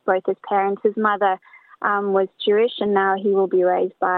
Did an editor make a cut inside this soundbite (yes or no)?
no